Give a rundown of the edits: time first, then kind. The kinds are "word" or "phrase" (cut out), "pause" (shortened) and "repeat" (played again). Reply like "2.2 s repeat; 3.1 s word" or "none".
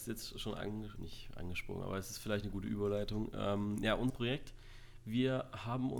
1.0 s word; 4.1 s word